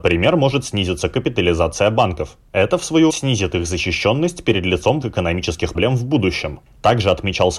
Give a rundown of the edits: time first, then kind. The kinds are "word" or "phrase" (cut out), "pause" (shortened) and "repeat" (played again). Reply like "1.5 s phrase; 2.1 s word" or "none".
3.1 s word; 5.0 s word; 5.7 s word